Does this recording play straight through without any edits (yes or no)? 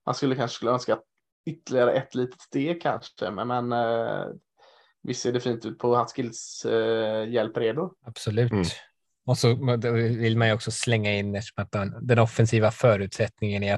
no